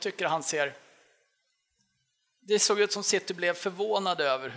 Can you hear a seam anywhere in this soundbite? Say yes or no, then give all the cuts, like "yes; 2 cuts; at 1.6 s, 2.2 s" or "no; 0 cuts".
no; 0 cuts